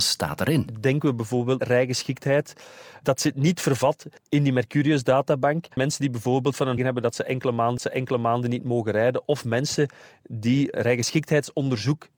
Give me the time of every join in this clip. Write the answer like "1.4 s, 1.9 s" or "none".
1.6 s, 4.2 s, 5.7 s, 6.8 s, 7.8 s, 10.7 s